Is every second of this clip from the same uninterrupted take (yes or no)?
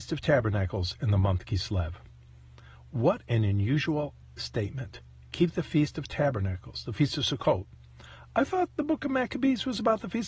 yes